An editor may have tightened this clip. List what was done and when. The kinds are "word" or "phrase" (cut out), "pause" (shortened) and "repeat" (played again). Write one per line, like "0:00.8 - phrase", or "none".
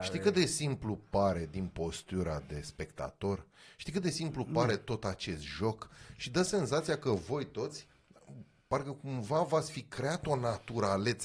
none